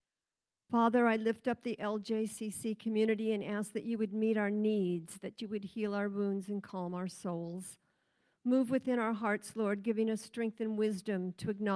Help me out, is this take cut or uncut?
uncut